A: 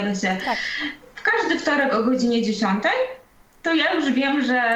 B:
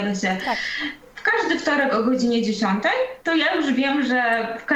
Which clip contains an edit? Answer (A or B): B